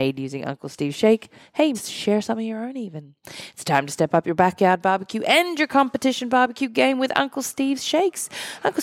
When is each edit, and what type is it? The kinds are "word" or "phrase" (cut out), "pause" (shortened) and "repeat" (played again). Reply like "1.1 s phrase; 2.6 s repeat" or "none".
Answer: 1.7 s word